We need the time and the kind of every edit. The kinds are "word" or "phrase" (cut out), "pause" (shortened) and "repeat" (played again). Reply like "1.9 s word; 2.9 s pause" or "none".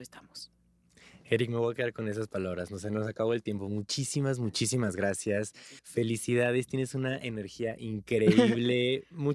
5.8 s pause